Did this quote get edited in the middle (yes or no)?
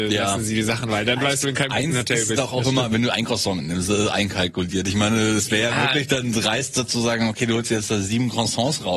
yes